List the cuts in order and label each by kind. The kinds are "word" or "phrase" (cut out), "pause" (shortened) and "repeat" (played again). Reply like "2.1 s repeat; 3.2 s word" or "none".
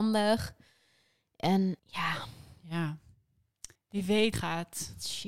1.8 s pause; 3.8 s pause; 4.3 s phrase